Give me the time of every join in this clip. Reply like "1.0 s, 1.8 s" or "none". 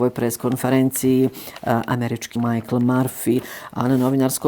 2.4 s